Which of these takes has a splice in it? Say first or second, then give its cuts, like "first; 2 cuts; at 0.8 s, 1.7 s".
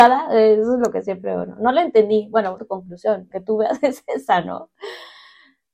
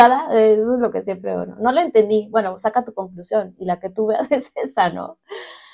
first; 2 cuts; at 2.6 s, 3.3 s